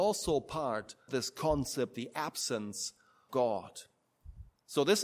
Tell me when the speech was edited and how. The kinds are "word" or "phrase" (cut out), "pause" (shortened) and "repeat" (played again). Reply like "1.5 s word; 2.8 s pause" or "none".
1.1 s word; 1.9 s word; 3.3 s word